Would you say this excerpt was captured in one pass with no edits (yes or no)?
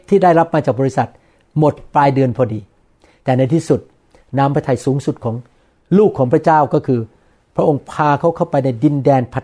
yes